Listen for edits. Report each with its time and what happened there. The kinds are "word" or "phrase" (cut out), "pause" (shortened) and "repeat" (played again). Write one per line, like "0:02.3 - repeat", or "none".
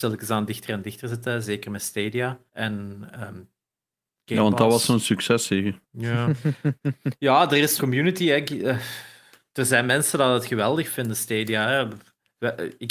0:02.5 - pause
0:05.8 - pause
0:07.8 - phrase

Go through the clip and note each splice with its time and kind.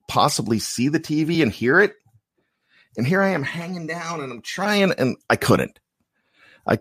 none

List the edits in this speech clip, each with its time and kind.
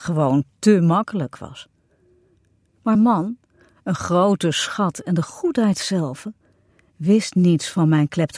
0:02.9 - word

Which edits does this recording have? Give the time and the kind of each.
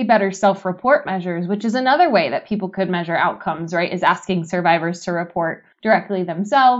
0:05.7 - pause

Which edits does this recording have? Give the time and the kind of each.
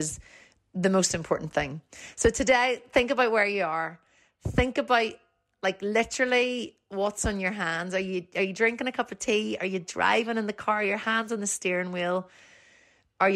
none

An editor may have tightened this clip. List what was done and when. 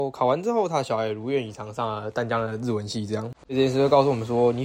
none

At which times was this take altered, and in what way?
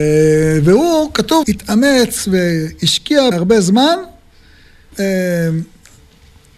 0:01.4 - word
0:03.3 - word
0:04.9 - word

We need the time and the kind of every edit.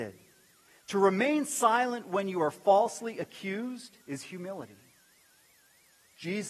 0:04.0 - pause

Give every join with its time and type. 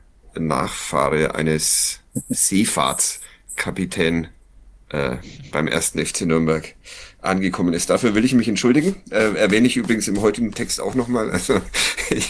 none

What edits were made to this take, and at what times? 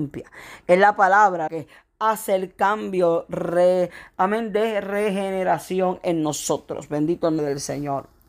0:01.5 - word
0:07.4 - word

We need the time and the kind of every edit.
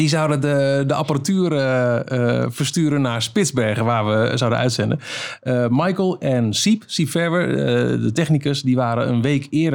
none

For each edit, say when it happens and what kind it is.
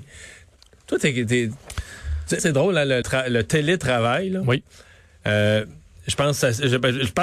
0:02.4 - word
0:03.0 - word

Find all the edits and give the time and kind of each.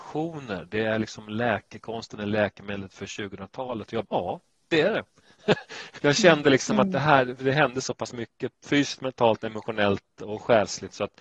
0:04.0 - word
0:06.0 - word

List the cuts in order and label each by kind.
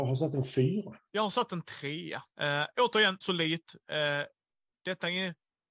0:01.1 - pause
0:02.3 - pause
0:03.2 - phrase
0:03.8 - pause

